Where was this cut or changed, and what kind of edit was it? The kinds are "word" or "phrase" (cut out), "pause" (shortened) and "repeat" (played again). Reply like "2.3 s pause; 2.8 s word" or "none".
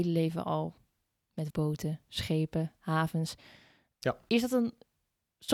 1.5 s word